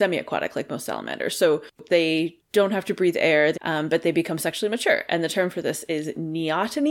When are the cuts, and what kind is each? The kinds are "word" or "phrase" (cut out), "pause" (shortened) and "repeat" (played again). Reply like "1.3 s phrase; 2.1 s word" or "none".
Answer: 3.6 s phrase